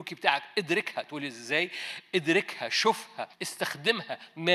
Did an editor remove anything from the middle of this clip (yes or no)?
yes